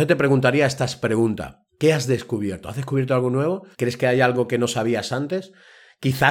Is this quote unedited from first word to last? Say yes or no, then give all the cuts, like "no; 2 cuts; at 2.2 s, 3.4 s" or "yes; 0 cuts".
no; 1 cut; at 3.7 s